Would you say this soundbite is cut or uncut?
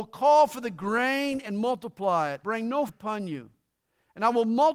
cut